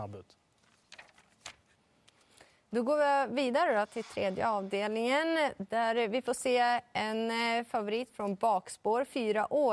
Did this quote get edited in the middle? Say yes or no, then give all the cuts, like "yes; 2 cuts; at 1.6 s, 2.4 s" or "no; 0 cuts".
no; 0 cuts